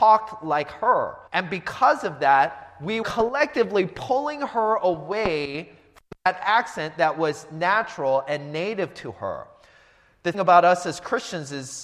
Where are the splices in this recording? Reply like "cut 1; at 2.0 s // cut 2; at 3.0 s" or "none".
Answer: cut 1; at 1.3 s // cut 2; at 3.0 s // cut 3; at 10.3 s